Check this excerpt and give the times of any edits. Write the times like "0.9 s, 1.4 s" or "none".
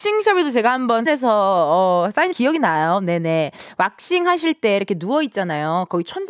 1.1 s, 2.3 s